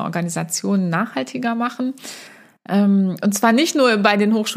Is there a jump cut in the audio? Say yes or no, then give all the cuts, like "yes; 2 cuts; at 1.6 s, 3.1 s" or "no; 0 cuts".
no; 0 cuts